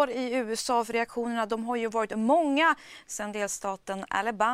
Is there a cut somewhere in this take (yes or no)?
no